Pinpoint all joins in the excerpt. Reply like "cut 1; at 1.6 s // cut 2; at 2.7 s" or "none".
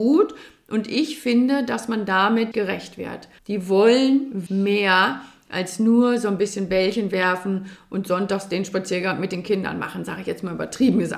cut 1; at 2.5 s // cut 2; at 3.4 s // cut 3; at 4.5 s